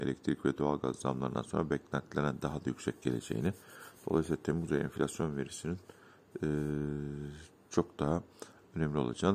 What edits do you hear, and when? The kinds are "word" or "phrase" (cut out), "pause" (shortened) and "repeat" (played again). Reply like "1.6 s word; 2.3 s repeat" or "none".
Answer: none